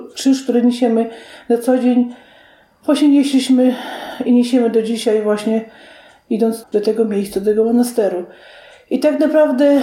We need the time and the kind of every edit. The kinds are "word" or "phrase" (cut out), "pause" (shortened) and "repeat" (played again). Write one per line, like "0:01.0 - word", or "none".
0:06.6 - word